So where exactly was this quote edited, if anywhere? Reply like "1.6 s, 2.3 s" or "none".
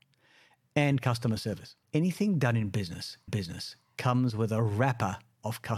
1.8 s, 3.3 s